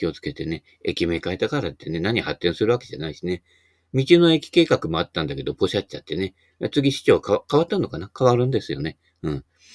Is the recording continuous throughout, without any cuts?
yes; 0 cuts

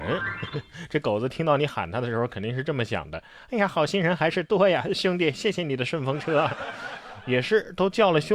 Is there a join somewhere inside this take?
no; 0 cuts

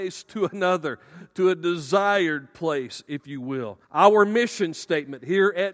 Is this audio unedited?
no; 1 cut; at 3.8 s

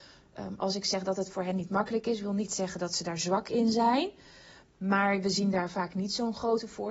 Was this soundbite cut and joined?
no; 0 cuts

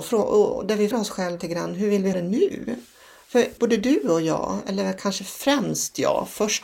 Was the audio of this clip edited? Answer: yes; 4 cuts; at 0.9 s, 1.4 s, 2.1 s, 3.6 s

